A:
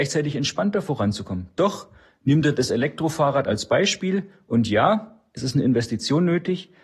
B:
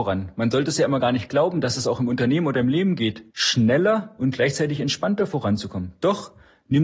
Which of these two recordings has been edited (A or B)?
B